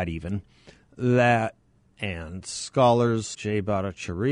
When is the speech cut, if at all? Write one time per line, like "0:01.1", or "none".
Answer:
0:01.9
0:03.3